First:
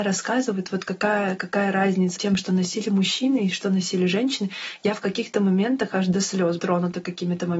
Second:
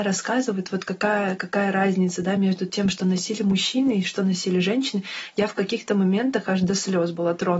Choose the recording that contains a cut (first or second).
first